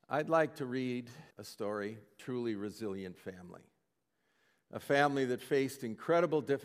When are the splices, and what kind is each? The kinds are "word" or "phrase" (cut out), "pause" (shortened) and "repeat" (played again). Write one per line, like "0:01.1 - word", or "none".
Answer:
0:01.3 - pause